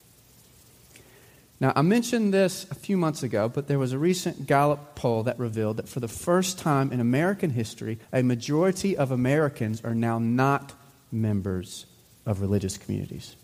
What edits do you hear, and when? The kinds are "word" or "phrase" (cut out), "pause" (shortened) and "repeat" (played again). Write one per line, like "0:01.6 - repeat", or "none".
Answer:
0:08.0 - pause